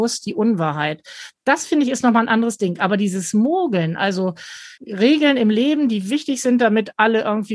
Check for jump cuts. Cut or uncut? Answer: cut